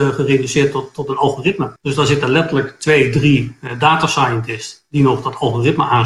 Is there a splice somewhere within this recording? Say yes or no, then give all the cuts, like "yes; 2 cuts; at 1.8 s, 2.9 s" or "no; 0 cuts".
yes; 1 cut; at 1.8 s